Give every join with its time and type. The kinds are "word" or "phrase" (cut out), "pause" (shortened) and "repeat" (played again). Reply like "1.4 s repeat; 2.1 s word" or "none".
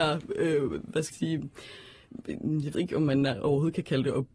1.1 s word; 2.7 s word